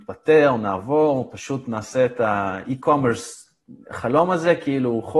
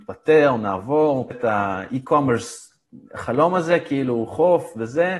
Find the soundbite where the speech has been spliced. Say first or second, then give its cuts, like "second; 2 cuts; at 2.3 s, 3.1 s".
second; 1 cut; at 1.3 s